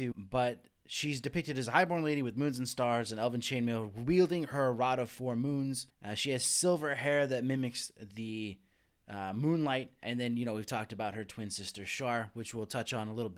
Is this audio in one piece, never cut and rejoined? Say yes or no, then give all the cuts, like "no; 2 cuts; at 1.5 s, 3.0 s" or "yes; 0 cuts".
yes; 0 cuts